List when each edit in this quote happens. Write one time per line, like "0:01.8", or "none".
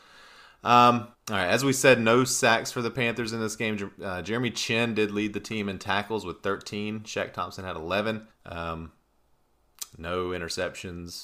0:01.1
0:08.3